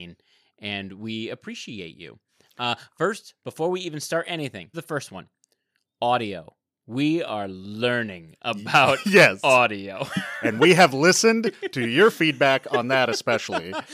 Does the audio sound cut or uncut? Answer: cut